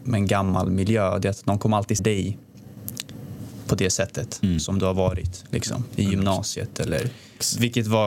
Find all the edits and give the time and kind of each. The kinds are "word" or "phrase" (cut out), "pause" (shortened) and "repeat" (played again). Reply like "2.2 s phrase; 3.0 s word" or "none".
2.0 s word

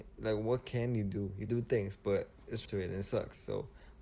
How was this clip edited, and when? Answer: 1.5 s word; 2.6 s word

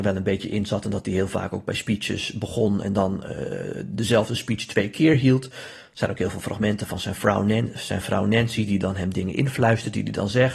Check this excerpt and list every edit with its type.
none

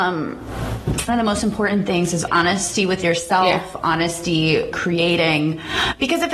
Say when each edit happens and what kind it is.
1.1 s phrase; 2.3 s word; 4.7 s word

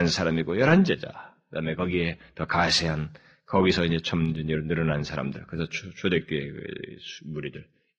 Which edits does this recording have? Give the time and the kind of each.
none

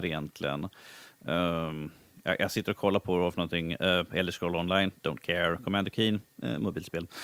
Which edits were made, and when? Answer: none

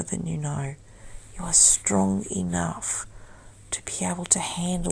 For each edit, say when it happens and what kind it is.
none

